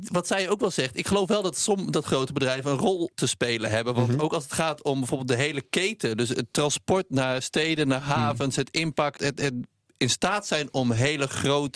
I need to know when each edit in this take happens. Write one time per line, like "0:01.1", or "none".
0:03.1
0:09.2